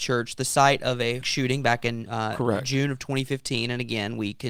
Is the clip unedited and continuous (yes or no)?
no